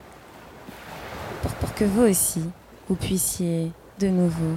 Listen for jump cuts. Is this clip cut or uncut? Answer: cut